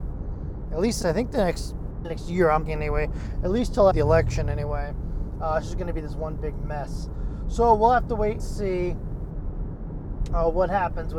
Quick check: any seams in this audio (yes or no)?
yes